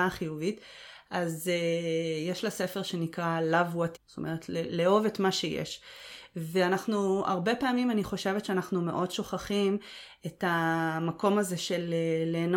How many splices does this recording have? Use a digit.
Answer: 1